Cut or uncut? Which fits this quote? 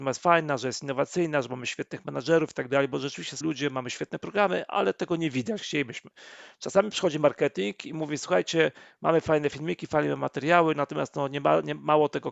cut